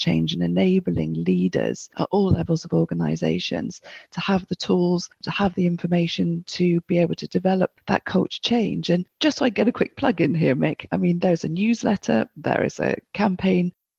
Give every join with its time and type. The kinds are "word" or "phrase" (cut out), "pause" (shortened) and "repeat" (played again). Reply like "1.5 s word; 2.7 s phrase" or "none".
9.1 s pause